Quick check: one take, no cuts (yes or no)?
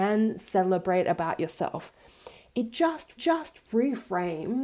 no